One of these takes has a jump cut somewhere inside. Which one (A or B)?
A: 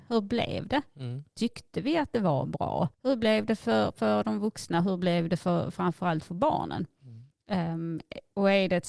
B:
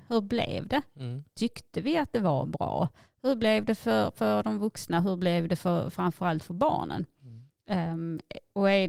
A